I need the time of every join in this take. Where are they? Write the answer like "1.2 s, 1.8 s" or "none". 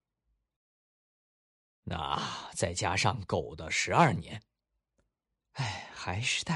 none

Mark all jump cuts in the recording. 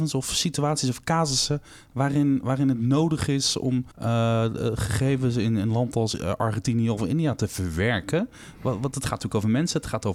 3.9 s

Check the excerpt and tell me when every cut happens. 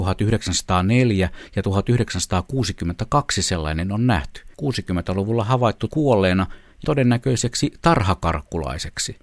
4.5 s, 5.9 s, 6.8 s

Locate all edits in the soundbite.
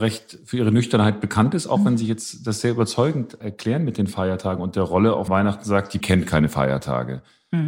3.4 s, 5.3 s, 6.0 s

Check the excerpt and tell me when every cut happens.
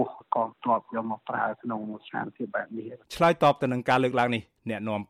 3.0 s

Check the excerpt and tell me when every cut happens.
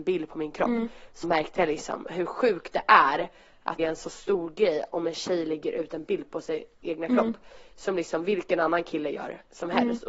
1.2 s, 3.8 s

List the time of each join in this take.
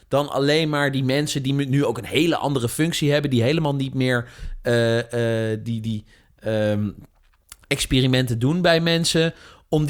none

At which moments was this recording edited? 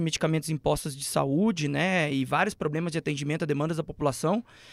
none

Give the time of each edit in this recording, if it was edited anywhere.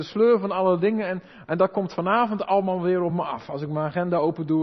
none

